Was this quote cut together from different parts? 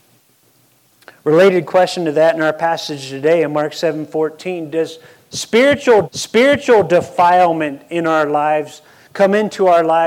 yes; 1 cut; at 6.0 s

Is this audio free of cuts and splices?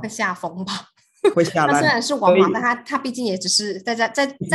no; 1 cut; at 1.3 s

